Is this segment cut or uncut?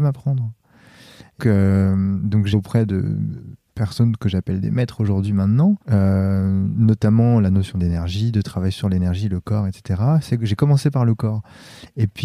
cut